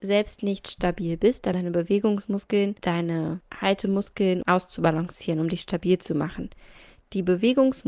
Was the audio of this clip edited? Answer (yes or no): yes